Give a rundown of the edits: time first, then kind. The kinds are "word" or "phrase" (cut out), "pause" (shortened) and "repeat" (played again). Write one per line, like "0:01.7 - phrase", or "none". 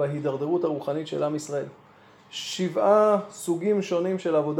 none